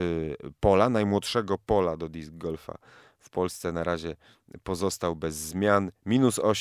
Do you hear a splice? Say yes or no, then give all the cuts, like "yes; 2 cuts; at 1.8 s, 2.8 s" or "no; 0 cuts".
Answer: no; 0 cuts